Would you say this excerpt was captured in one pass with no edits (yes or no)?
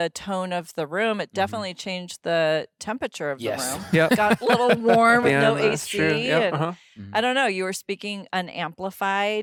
no